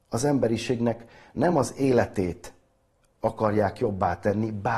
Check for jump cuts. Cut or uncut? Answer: uncut